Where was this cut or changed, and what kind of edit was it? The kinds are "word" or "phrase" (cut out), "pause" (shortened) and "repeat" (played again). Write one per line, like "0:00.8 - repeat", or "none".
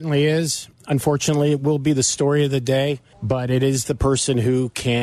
0:03.1 - pause